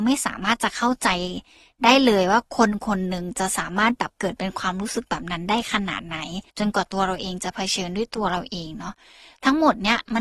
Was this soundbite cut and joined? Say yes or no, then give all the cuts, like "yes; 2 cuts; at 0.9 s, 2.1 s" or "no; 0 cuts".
yes; 1 cut; at 6.5 s